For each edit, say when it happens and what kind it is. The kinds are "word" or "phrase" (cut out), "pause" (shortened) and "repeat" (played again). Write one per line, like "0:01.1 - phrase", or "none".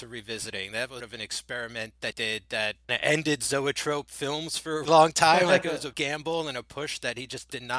0:01.0 - word
0:02.1 - word
0:02.9 - word
0:04.8 - word
0:05.9 - word